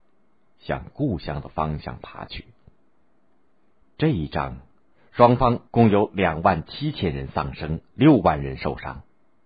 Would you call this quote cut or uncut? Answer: cut